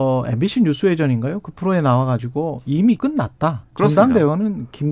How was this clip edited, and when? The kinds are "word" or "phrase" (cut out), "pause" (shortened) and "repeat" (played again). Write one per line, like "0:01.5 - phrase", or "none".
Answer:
0:03.0 - word
0:03.7 - pause

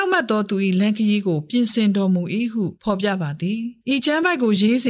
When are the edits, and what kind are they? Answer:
0:02.8 - pause
0:03.8 - pause

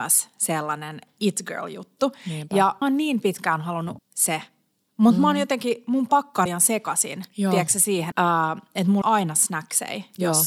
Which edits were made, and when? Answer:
0:02.8 - word
0:04.0 - word
0:06.5 - word
0:08.1 - word
0:09.0 - word

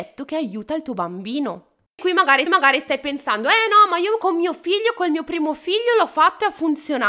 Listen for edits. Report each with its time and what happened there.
0:02.5 - repeat

